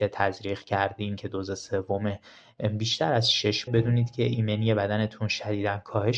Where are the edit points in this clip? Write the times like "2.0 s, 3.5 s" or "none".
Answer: 3.7 s